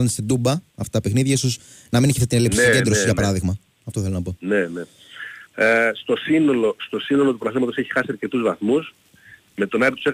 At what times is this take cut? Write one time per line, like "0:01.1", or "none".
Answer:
0:05.5